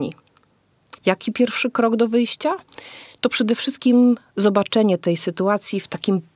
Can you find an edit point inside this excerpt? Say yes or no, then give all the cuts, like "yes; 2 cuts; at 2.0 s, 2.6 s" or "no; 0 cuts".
yes; 1 cut; at 1.0 s